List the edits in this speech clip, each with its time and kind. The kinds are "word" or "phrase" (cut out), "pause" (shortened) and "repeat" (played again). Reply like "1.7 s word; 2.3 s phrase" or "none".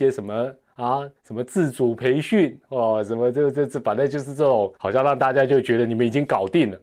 1.2 s pause; 4.8 s pause

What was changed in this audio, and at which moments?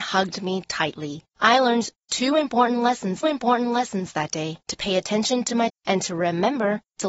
1.3 s pause; 3.2 s repeat; 4.6 s pause; 5.7 s word

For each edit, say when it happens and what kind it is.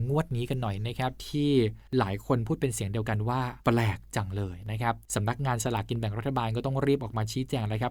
1.9 s pause; 3.6 s pause; 5.0 s pause

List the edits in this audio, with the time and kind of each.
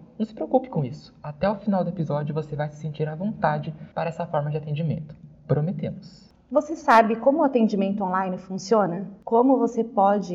3.9 s pause

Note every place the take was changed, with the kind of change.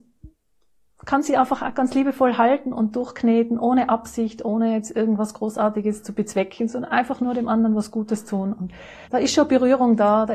9.1 s pause

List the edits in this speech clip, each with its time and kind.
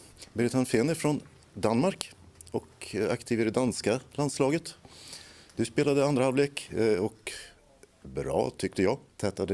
none

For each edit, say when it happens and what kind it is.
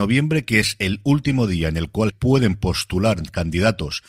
2.1 s word

